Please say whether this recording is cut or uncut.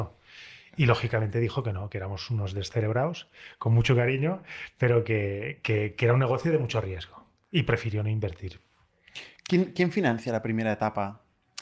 uncut